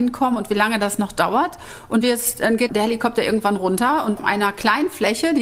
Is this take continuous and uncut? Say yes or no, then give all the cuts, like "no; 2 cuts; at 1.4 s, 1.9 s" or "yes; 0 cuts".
no; 3 cuts; at 2.0 s, 2.7 s, 4.2 s